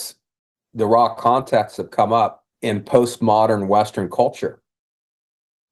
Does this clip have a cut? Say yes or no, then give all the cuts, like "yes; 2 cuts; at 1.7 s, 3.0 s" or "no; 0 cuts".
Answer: yes; 1 cut; at 2.5 s